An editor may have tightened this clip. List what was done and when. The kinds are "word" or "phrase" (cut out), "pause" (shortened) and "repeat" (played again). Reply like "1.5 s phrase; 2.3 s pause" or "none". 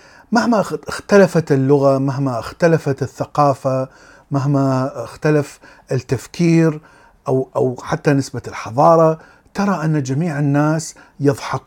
none